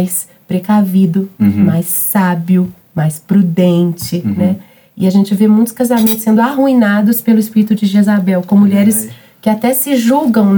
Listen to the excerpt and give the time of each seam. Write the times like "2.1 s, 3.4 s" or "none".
none